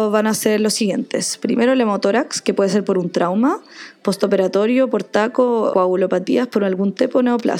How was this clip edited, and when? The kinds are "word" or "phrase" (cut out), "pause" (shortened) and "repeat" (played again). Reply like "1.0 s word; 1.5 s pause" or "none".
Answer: 5.7 s word